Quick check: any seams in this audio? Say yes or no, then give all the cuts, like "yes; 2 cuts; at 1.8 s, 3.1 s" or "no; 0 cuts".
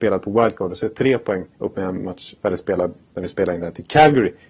yes; 1 cut; at 1.5 s